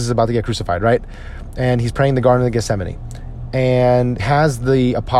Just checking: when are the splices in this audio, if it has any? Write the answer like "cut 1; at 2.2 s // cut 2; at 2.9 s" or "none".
cut 1; at 4.2 s